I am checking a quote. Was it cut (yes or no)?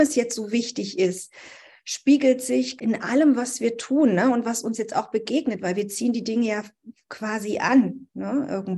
yes